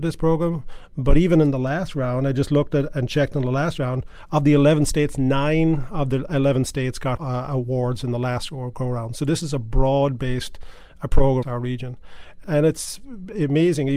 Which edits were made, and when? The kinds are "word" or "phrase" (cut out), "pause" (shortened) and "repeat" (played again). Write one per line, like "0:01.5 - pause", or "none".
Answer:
0:07.2 - word
0:11.4 - word
0:12.4 - word